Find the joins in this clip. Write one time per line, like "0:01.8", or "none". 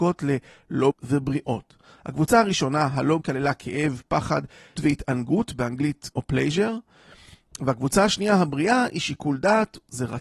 0:00.9
0:03.2
0:04.8
0:06.1